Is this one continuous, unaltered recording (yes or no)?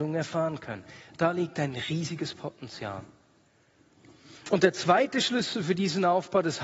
yes